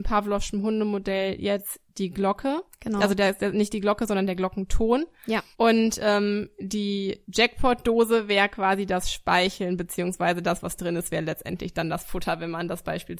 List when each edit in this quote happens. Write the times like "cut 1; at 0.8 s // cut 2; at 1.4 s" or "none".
cut 1; at 5.5 s // cut 2; at 7.2 s